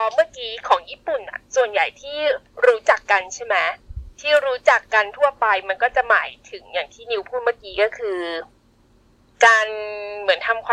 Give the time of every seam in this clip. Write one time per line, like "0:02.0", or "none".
0:04.1
0:09.0